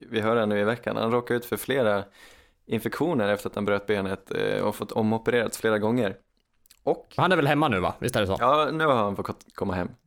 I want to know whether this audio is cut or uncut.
uncut